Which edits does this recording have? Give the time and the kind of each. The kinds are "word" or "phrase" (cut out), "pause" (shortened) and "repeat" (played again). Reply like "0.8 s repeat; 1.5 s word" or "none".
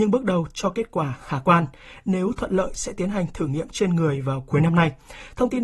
none